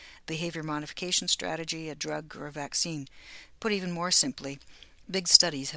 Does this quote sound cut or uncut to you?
uncut